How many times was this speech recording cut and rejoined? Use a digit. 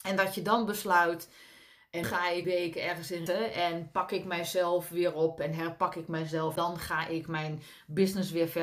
4